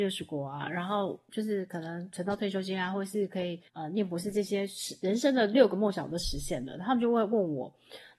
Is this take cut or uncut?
cut